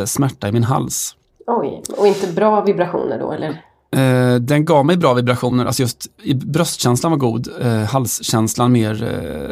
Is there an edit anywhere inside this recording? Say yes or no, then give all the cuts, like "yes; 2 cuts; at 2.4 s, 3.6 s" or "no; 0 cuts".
no; 0 cuts